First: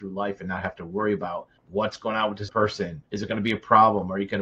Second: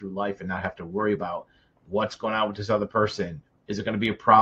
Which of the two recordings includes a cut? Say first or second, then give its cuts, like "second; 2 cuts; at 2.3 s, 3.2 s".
first; 3 cuts; at 1.6 s, 2.5 s, 3.1 s